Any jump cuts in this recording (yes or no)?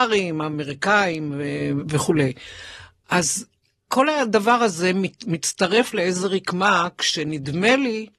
yes